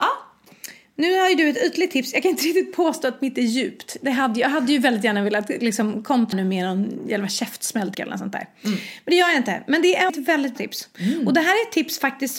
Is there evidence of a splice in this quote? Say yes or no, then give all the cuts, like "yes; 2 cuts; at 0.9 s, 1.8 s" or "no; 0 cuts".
yes; 4 cuts; at 6.3 s, 7.9 s, 10.1 s, 10.6 s